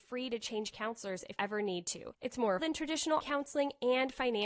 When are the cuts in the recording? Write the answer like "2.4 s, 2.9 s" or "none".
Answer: 1.4 s, 2.6 s, 3.2 s